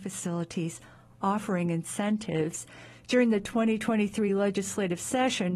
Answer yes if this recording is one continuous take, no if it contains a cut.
yes